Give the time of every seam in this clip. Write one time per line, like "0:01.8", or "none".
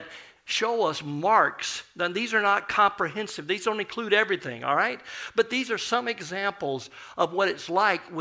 none